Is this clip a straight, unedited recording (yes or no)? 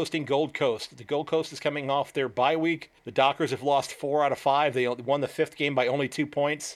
no